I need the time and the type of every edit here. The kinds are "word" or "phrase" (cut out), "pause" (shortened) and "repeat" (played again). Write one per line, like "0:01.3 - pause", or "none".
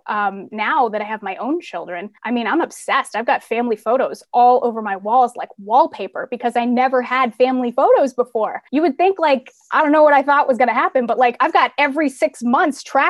0:02.2 - pause
0:08.7 - pause